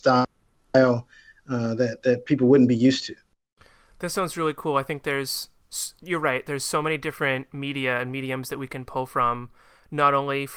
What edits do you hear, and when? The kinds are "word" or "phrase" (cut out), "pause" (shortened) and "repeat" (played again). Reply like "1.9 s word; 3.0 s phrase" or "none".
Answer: none